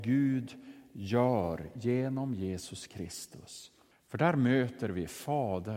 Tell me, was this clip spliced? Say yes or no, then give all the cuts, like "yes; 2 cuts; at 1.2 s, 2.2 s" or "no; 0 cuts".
yes; 1 cut; at 3.9 s